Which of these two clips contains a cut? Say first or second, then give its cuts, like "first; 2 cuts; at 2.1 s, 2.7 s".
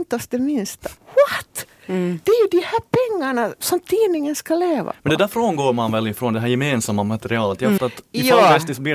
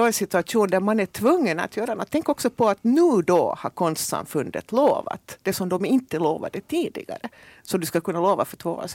first; 3 cuts; at 1.0 s, 3.6 s, 7.8 s